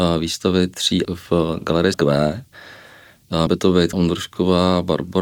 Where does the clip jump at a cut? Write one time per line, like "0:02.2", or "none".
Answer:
0:01.0
0:01.9
0:03.5
0:03.9